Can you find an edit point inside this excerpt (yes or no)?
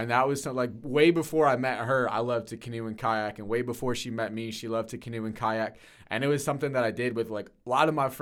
no